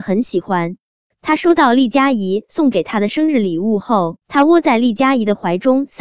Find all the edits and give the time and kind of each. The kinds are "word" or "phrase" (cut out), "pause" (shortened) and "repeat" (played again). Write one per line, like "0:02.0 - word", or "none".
0:04.2 - pause